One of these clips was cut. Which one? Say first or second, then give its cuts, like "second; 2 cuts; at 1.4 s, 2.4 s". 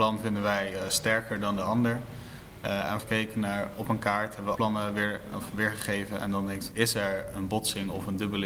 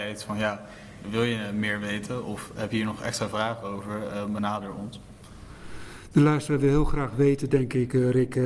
first; 4 cuts; at 3.0 s, 3.7 s, 4.5 s, 6.7 s